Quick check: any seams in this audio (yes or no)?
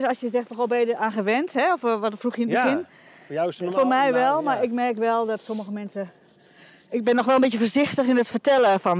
no